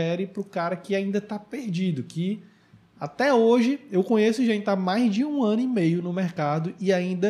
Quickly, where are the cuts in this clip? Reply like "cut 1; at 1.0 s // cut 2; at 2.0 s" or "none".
none